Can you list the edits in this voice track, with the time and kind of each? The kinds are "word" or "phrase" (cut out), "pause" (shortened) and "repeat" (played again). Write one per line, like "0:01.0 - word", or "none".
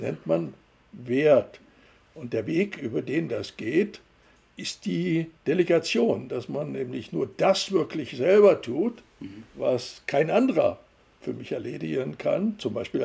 0:05.4 - pause
0:09.5 - pause
0:11.2 - word